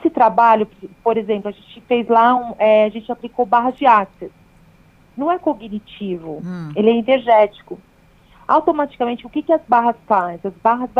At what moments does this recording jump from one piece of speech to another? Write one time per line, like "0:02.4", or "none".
none